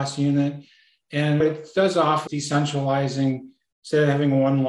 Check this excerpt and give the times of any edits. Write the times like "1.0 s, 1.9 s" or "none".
1.4 s, 2.3 s